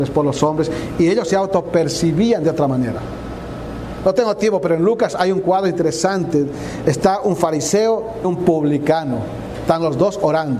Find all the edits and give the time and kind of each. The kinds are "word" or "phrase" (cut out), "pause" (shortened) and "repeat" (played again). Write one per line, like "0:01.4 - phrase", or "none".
0:08.2 - word